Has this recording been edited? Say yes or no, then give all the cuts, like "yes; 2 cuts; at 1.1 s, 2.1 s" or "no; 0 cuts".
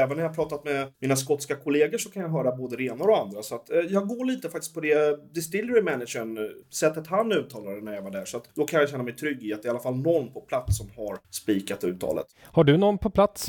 yes; 5 cuts; at 0.9 s, 6.6 s, 8.5 s, 11.2 s, 12.3 s